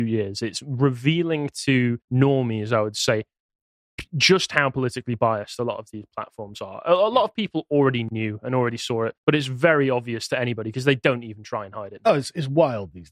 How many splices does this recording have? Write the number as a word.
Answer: two